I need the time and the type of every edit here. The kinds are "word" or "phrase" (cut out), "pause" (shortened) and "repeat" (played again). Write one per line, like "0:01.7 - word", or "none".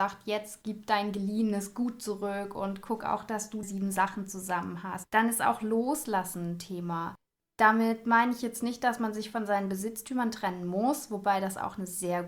0:03.6 - word